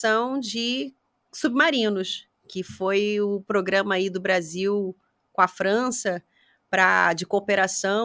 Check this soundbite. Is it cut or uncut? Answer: uncut